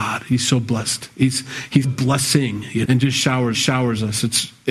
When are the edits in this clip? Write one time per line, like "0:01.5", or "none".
0:01.8
0:02.8
0:03.5